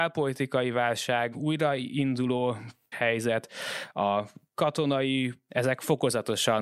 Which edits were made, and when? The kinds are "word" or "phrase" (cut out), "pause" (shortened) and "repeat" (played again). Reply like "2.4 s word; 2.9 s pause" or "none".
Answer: 1.3 s word; 2.9 s word; 5.5 s word